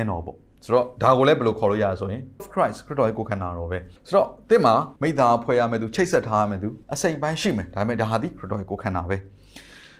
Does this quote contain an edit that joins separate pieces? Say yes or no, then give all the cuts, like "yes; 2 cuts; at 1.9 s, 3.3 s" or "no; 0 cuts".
yes; 4 cuts; at 2.4 s, 4.0 s, 5.0 s, 6.8 s